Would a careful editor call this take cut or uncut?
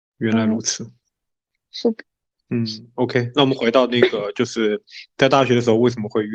uncut